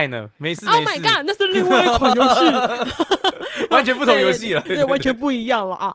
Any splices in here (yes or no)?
yes